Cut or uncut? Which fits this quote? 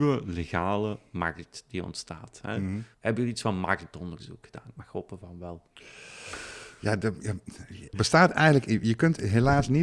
cut